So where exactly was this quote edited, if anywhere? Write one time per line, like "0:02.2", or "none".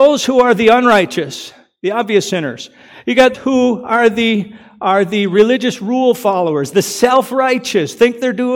0:03.3